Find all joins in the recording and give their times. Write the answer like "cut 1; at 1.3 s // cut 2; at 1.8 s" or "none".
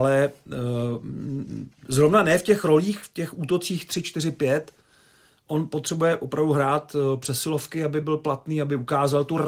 none